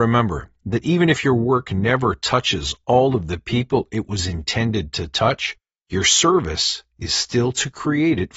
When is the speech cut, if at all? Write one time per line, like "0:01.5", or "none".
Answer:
none